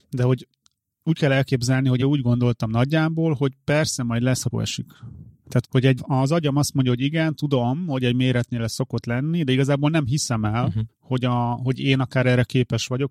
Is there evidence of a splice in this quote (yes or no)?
yes